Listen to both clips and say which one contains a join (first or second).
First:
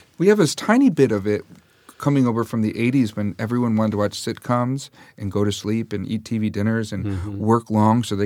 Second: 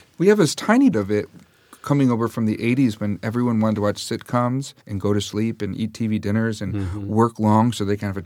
second